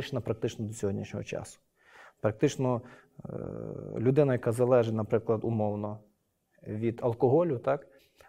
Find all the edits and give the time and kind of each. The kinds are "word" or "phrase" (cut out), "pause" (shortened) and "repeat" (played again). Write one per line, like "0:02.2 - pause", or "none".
none